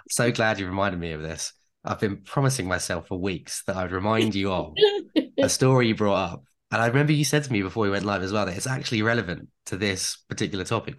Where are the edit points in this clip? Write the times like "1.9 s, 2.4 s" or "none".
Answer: none